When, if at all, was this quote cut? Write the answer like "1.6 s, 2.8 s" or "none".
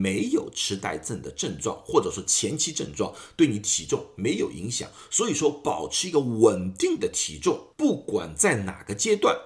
7.7 s

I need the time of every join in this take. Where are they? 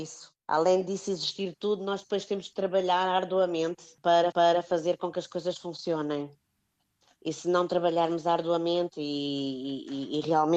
4.3 s

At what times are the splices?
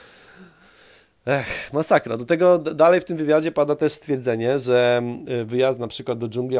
none

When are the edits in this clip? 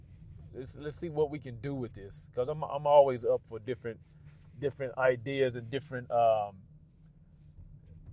none

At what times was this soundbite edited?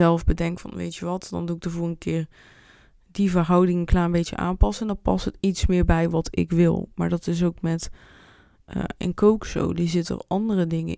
none

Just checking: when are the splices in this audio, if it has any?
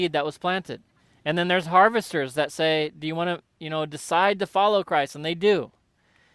1.0 s, 3.5 s

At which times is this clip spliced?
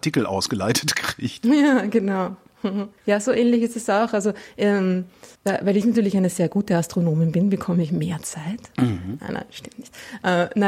3.0 s, 5.3 s

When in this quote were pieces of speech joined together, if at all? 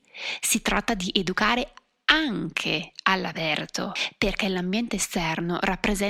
none

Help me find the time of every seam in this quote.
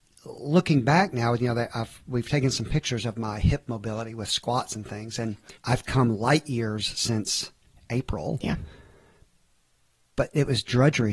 5.6 s

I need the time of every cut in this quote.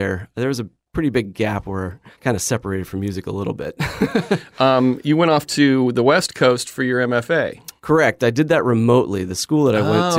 2.1 s, 7.8 s

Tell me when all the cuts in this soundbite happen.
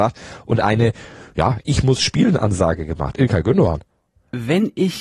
none

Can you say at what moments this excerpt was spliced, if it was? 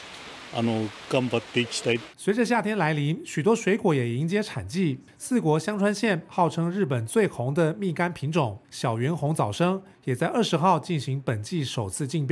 2.1 s

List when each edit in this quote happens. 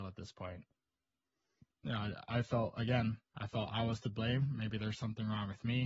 none

